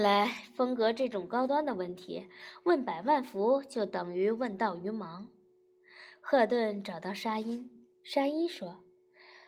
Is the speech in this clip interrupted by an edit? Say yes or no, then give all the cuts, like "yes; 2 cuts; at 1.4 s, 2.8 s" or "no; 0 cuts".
no; 0 cuts